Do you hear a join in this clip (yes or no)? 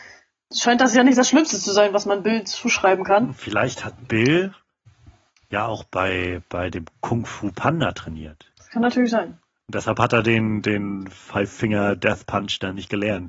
no